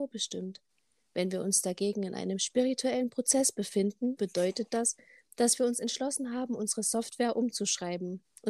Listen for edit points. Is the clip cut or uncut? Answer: cut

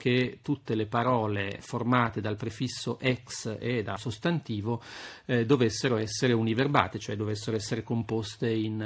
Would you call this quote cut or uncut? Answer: cut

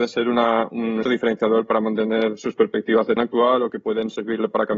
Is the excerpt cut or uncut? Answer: cut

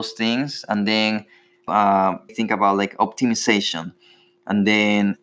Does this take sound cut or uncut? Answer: cut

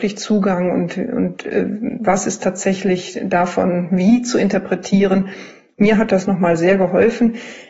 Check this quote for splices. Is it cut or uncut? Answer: uncut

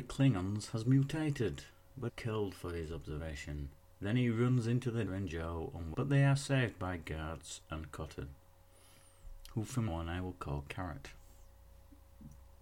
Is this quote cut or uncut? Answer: cut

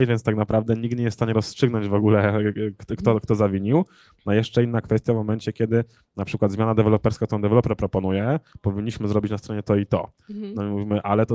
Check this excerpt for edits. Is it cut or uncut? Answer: cut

